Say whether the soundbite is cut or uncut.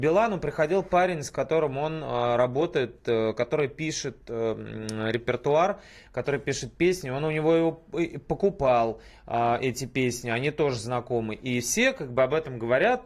uncut